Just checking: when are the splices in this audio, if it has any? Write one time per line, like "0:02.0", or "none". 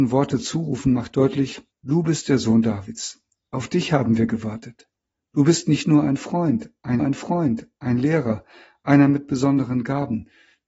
0:01.7
0:07.0